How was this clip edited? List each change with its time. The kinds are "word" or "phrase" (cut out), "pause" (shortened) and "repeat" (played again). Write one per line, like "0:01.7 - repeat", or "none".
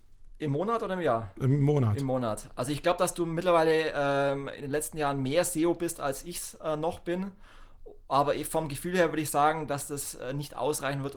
none